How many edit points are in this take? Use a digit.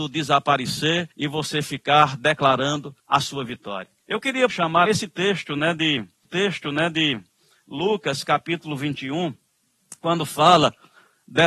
7